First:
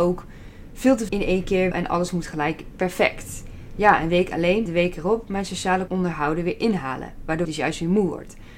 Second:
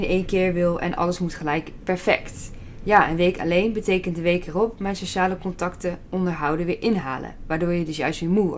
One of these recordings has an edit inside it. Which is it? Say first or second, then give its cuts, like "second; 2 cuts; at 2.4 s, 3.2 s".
first; 5 cuts; at 1.1 s, 1.7 s, 4.7 s, 5.9 s, 7.4 s